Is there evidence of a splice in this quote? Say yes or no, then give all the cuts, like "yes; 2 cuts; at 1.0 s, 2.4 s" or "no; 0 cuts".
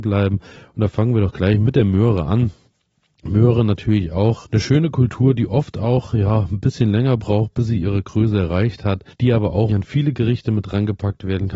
yes; 3 cuts; at 4.4 s, 9.1 s, 9.7 s